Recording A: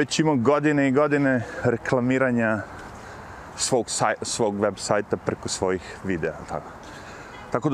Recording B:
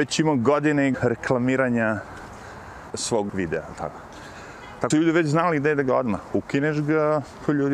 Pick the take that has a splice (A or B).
B